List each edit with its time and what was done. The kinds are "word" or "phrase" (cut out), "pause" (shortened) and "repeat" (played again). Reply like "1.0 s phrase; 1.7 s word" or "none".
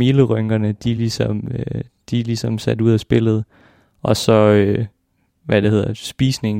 none

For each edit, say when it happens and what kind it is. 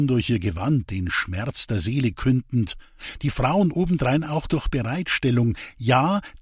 none

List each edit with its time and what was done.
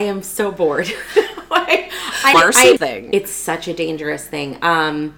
2.3 s word; 2.8 s phrase

